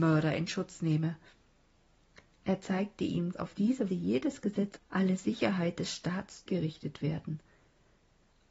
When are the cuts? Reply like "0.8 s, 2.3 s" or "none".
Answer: 3.3 s, 3.9 s, 4.8 s, 6.5 s